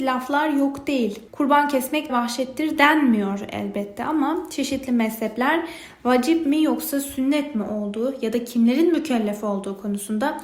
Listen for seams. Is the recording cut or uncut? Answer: cut